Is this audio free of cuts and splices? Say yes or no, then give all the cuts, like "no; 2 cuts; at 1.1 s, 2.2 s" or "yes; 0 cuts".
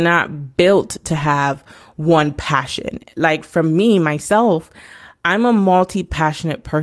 yes; 0 cuts